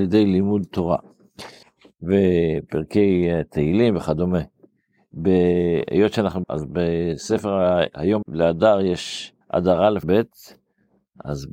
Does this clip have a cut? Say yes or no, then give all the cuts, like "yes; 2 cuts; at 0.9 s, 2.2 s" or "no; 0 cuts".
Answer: yes; 5 cuts; at 1.6 s, 6.4 s, 8.2 s, 9.4 s, 10.0 s